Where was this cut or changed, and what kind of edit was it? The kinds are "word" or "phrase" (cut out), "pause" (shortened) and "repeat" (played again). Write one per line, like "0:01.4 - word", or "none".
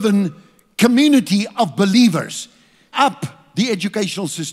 0:02.9 - word